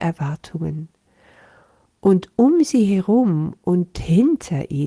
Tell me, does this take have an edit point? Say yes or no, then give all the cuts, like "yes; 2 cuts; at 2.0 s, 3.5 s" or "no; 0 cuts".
no; 0 cuts